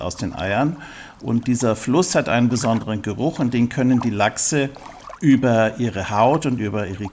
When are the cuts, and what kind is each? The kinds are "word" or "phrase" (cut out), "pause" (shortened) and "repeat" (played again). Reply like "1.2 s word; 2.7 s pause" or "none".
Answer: none